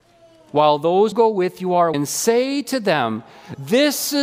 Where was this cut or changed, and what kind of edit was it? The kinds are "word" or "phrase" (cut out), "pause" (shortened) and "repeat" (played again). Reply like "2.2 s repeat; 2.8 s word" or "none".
1.1 s word; 1.9 s word